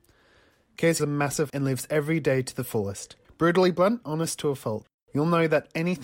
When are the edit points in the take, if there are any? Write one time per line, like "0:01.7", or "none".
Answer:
0:01.0
0:01.5
0:03.2
0:04.0
0:04.9